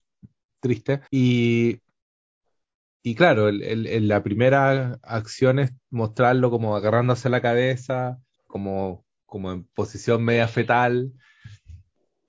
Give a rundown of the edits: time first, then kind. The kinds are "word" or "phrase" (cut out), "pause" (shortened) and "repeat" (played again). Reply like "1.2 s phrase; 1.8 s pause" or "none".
1.1 s pause; 8.4 s pause